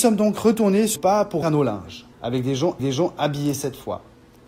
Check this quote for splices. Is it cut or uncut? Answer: cut